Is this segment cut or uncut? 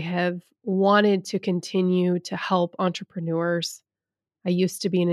uncut